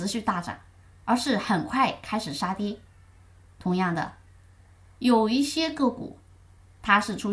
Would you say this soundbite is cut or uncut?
uncut